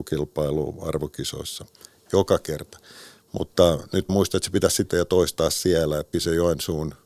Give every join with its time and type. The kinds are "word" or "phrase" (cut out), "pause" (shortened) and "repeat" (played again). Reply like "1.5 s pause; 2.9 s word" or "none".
4.1 s word; 4.9 s word; 6.1 s word

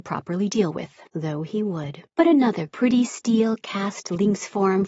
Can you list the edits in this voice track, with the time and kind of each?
1.1 s pause; 2.1 s pause; 2.7 s phrase

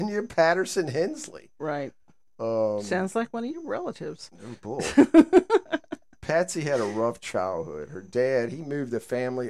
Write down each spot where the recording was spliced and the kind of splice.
none

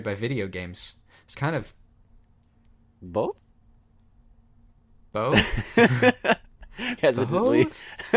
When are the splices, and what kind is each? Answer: 1.3 s word; 7.0 s word

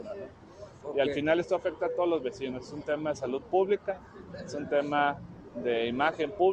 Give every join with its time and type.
none

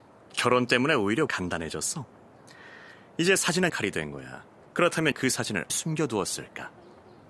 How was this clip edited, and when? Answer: 1.3 s word; 3.7 s word; 5.1 s word; 5.7 s word

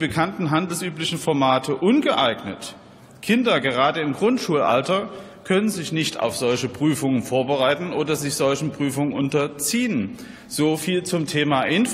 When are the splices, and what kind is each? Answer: none

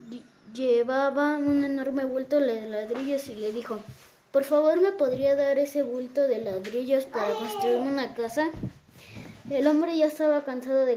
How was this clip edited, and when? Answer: none

